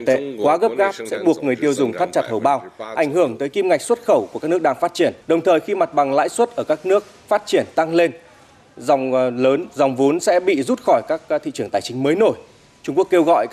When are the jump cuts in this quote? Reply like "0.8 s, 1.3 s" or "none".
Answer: 5.2 s